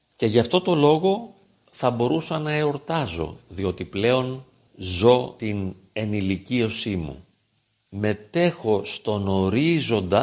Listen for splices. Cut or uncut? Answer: uncut